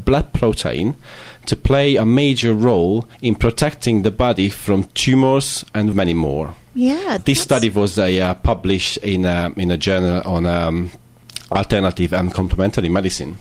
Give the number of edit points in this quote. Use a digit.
3